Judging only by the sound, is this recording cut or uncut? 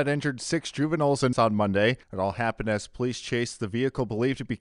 cut